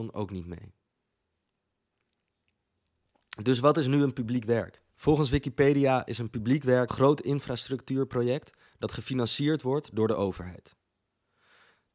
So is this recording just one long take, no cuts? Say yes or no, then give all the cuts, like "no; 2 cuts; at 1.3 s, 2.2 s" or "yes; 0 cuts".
no; 2 cuts; at 4.9 s, 6.9 s